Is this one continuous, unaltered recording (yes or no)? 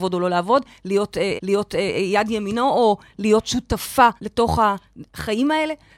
no